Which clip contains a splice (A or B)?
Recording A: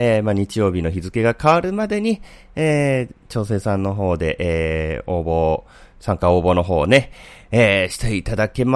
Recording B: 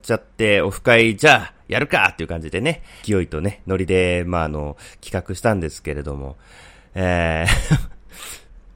B